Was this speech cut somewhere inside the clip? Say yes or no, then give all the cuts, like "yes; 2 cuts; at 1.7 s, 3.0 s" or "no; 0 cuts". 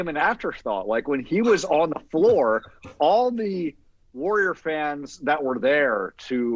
no; 0 cuts